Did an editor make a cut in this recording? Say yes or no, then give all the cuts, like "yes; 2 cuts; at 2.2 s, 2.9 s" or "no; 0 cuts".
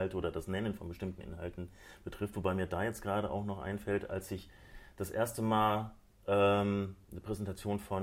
no; 0 cuts